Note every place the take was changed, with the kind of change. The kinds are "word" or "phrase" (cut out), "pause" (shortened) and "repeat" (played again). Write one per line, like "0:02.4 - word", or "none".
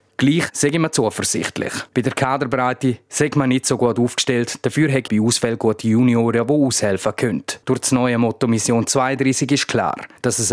0:01.9 - pause
0:05.1 - word
0:07.6 - pause